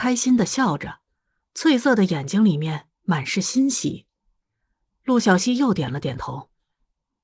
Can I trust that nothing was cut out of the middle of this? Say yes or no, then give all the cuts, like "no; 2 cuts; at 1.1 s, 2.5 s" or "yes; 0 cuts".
yes; 0 cuts